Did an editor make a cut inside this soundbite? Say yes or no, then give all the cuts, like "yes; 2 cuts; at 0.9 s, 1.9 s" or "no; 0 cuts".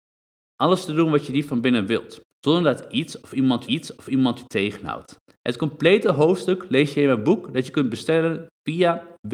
yes; 3 cuts; at 2.3 s, 3.6 s, 5.2 s